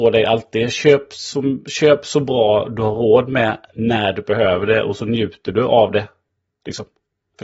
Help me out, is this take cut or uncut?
uncut